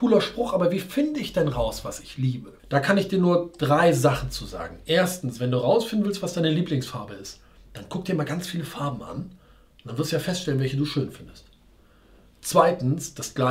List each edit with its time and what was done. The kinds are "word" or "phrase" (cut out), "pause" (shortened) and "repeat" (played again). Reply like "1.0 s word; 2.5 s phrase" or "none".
2.6 s pause